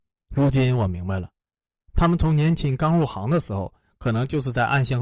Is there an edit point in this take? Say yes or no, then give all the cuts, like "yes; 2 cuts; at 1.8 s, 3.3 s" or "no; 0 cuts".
no; 0 cuts